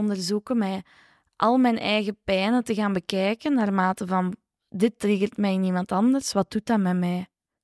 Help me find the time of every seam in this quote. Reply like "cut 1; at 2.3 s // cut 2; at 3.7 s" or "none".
none